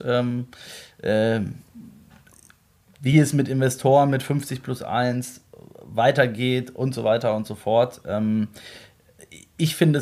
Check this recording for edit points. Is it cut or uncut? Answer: uncut